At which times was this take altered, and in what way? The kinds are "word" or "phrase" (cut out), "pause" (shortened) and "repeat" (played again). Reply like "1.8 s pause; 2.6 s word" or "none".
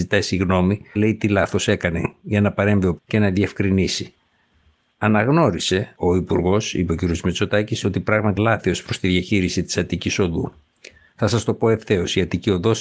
1.0 s phrase; 3.0 s word; 8.4 s word